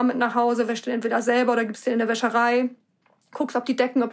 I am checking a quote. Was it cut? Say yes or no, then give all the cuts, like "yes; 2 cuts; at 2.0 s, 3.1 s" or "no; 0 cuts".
no; 0 cuts